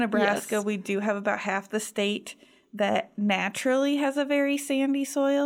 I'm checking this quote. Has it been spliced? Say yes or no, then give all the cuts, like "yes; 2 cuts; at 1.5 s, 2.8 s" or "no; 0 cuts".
no; 0 cuts